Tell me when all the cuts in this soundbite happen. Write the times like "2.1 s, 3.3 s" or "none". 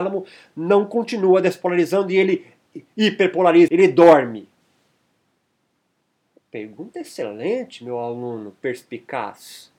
3.7 s